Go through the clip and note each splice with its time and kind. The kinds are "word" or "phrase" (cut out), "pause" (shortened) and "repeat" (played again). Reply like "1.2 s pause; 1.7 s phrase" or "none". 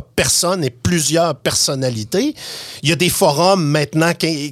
none